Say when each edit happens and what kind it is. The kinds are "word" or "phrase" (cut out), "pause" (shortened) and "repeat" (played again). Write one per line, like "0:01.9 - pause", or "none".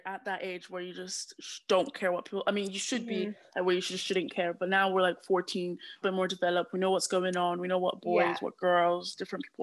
0:06.0 - phrase